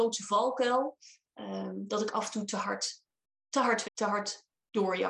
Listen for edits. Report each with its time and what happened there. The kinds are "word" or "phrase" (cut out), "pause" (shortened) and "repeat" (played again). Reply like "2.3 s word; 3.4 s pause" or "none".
3.8 s word